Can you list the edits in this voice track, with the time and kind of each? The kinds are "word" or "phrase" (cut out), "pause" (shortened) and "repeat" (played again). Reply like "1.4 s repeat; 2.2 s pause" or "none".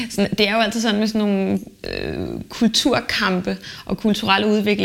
none